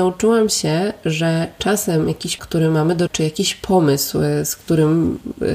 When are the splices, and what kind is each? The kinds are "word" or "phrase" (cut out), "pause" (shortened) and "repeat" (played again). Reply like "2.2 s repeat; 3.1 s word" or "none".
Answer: 2.4 s word; 3.1 s word

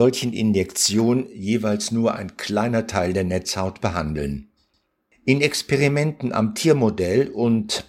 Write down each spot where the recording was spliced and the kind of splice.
none

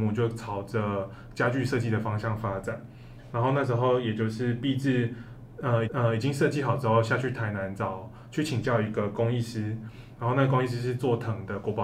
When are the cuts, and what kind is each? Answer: 5.9 s repeat

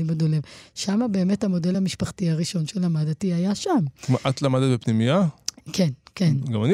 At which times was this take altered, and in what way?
none

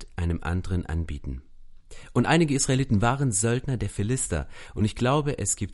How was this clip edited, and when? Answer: none

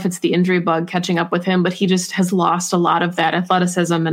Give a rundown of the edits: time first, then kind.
none

